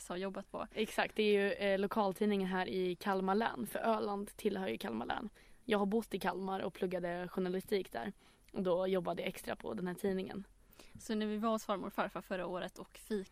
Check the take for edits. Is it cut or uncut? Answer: uncut